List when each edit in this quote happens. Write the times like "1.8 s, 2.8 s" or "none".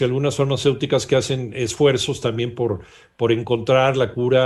none